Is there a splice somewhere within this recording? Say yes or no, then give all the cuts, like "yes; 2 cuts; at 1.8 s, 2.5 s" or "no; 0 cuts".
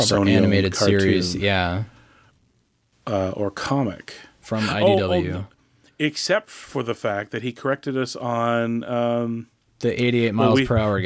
no; 0 cuts